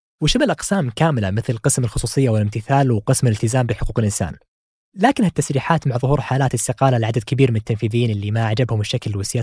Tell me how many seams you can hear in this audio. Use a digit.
0